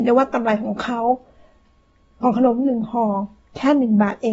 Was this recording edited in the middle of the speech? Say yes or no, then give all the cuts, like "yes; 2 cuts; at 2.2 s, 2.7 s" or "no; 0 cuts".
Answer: no; 0 cuts